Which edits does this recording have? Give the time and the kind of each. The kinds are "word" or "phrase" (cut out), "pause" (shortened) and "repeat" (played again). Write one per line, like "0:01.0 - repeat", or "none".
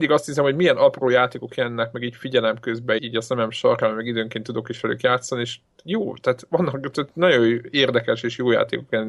0:03.0 - word